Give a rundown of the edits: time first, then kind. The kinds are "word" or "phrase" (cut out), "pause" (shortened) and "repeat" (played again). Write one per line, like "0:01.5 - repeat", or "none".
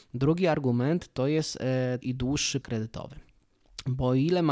0:02.0 - word
0:02.6 - word